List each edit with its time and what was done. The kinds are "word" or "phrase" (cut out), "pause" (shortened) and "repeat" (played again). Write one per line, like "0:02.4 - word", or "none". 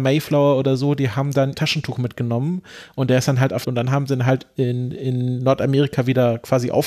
0:01.5 - phrase
0:03.6 - phrase